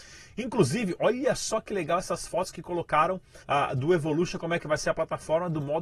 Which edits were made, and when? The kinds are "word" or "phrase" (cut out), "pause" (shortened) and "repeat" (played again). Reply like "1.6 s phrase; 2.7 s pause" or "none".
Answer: 3.4 s pause